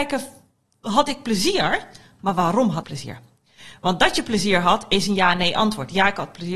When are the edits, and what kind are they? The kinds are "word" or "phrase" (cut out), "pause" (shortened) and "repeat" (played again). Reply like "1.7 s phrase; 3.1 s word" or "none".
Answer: 2.8 s word